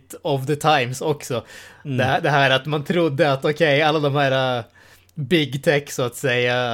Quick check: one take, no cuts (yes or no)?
yes